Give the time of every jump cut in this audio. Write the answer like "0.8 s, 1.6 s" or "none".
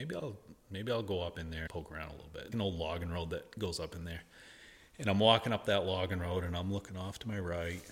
1.7 s, 2.5 s